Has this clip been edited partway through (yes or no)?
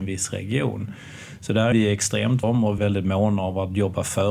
yes